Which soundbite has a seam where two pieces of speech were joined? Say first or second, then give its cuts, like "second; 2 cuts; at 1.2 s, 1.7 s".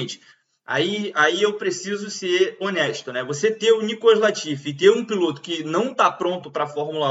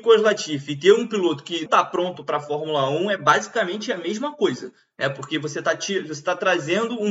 second; 1 cut; at 1.7 s